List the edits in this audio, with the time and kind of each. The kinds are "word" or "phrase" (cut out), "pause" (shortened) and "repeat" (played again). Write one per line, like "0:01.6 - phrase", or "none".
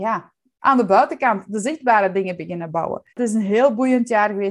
0:03.1 - pause